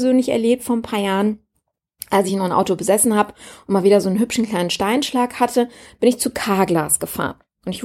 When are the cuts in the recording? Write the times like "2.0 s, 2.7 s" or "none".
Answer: none